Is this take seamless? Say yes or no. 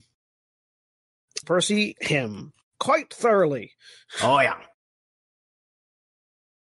no